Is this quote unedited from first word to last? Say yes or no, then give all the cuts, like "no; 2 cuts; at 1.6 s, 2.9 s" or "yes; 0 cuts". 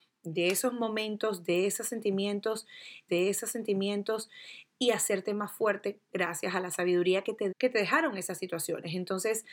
no; 2 cuts; at 3.1 s, 7.5 s